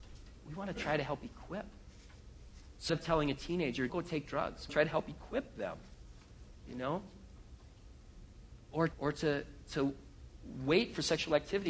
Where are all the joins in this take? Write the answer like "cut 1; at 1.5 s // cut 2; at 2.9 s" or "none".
cut 1; at 2.9 s // cut 2; at 3.9 s // cut 3; at 4.7 s // cut 4; at 8.9 s